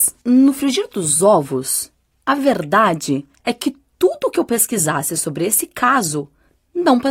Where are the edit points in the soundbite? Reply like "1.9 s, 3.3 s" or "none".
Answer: none